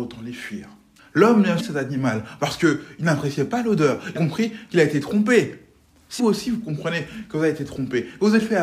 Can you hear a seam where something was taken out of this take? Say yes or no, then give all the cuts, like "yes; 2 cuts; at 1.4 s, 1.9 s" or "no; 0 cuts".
yes; 4 cuts; at 1.0 s, 1.6 s, 4.2 s, 6.2 s